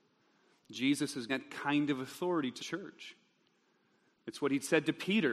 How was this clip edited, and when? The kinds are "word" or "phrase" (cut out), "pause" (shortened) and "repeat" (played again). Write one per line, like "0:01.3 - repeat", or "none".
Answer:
0:01.3 - word
0:02.6 - word

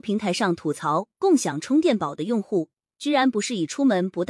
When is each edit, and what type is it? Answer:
none

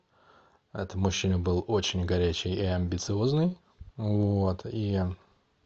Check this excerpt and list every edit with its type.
0:03.9 - pause

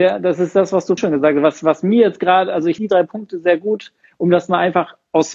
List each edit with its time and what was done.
0:01.0 - word
0:02.8 - word

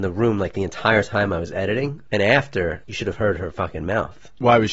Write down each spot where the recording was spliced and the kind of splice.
none

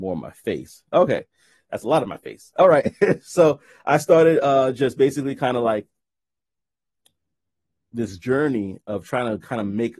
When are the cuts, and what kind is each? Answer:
none

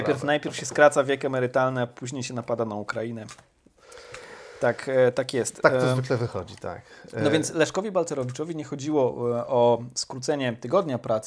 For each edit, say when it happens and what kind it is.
none

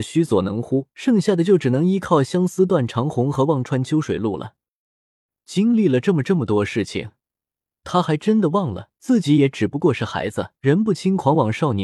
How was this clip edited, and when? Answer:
0:00.9 - pause
0:08.9 - pause
0:10.6 - pause

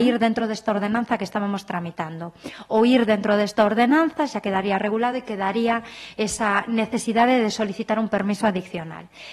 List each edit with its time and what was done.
none

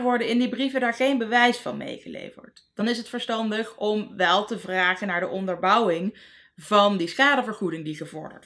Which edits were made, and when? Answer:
none

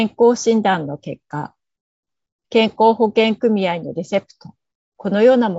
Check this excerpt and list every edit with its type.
none

